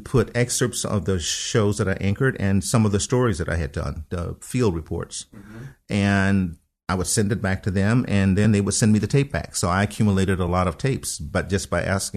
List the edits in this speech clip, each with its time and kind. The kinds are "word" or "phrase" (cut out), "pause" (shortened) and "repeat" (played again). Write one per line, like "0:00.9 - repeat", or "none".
none